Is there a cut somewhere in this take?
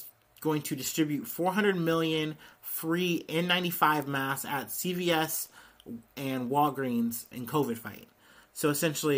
yes; 1 cut; at 7.3 s

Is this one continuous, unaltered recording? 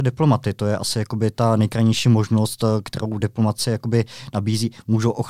yes; 0 cuts

